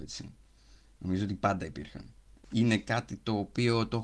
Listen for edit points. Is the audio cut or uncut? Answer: uncut